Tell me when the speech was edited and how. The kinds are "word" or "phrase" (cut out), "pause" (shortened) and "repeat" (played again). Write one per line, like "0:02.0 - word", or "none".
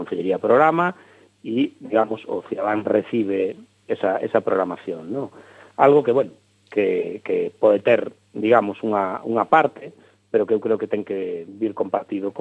none

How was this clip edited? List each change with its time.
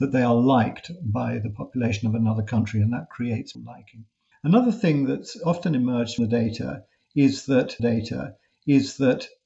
0:03.5 - word
0:04.3 - pause
0:06.2 - word
0:07.8 - repeat

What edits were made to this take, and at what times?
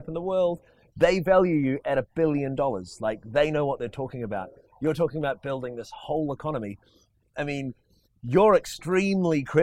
none

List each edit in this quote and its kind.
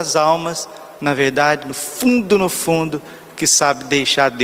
0:01.0 - pause

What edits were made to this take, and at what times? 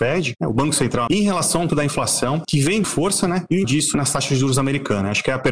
0:01.1 - word
0:01.7 - word
0:02.8 - word
0:03.6 - word

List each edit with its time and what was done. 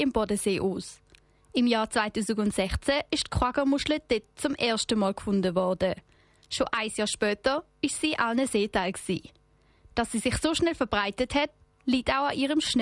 none

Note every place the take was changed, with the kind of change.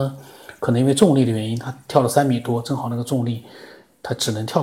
none

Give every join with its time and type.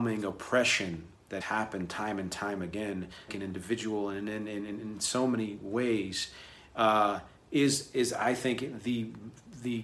0:01.4 - word
0:03.3 - word

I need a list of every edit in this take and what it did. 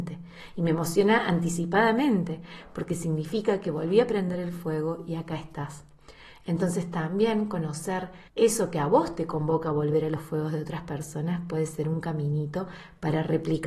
0:08.3 - pause

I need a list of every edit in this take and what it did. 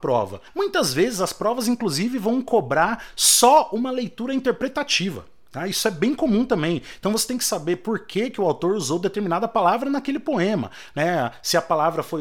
none

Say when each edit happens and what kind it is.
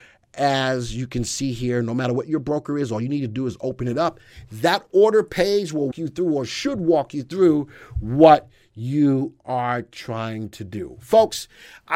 0:05.9 - word

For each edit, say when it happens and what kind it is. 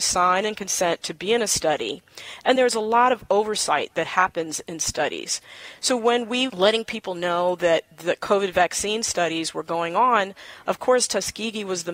0:02.6 - word
0:06.5 - phrase

